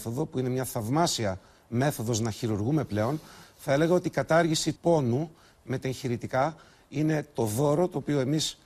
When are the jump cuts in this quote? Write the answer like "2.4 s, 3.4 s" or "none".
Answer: 4.8 s